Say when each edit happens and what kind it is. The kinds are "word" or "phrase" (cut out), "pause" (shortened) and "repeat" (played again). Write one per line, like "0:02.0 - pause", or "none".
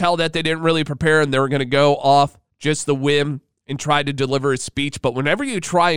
0:02.5 - pause